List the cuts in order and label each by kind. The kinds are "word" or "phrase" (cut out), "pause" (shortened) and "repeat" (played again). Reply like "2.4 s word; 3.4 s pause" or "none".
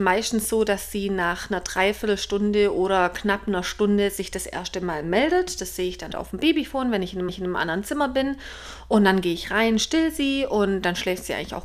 6.1 s word; 7.3 s repeat